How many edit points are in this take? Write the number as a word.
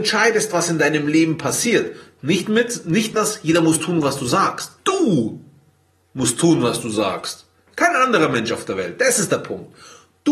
two